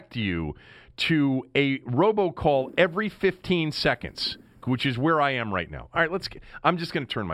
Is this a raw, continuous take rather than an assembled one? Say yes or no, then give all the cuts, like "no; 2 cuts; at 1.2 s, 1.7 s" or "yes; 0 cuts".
yes; 0 cuts